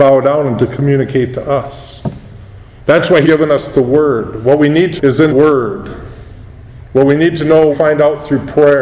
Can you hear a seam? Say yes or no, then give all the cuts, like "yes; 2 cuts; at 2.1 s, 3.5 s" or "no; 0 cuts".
yes; 4 cuts; at 3.2 s, 5.0 s, 5.3 s, 7.7 s